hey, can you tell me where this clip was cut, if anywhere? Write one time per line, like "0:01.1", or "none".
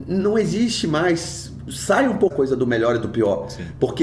0:02.3